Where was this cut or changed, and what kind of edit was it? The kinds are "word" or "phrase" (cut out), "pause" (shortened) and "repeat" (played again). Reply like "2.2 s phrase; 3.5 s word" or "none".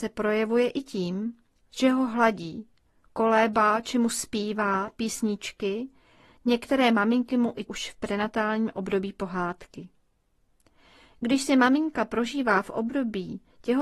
7.7 s word